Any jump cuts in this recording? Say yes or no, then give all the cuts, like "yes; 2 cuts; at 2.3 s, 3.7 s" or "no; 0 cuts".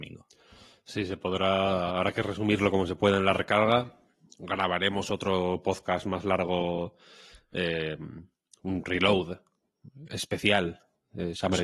no; 0 cuts